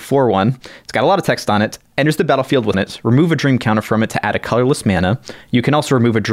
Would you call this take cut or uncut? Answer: cut